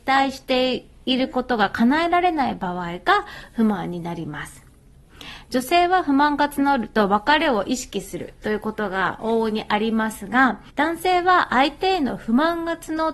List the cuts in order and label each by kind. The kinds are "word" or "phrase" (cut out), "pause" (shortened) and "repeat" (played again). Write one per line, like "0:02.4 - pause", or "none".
0:10.7 - pause